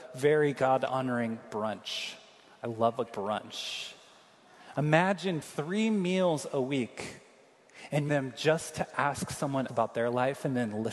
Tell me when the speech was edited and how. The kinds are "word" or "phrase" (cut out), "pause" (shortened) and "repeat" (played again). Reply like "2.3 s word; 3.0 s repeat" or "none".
3.1 s word; 5.4 s word; 8.1 s word; 9.7 s word